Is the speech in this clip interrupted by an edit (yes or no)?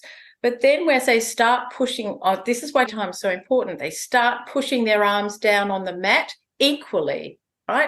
yes